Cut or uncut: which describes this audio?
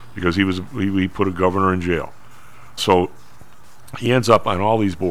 cut